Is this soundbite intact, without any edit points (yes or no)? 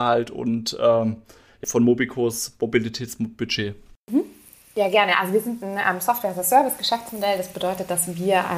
no